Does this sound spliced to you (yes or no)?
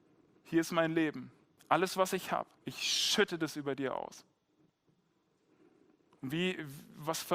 yes